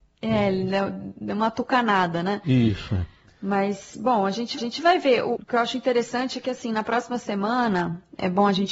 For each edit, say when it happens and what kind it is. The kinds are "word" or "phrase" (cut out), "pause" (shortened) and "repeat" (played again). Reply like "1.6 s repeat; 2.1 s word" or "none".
4.6 s repeat; 5.4 s word